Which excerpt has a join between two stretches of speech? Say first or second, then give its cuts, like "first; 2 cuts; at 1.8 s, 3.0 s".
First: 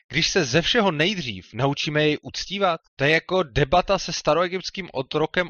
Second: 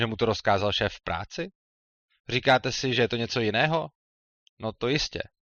first; 1 cut; at 2.9 s